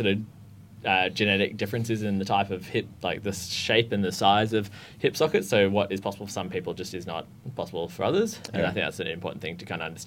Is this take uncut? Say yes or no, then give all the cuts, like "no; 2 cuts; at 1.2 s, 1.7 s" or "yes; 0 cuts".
yes; 0 cuts